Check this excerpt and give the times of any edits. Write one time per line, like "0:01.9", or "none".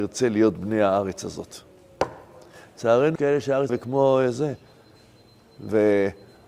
0:03.2
0:03.7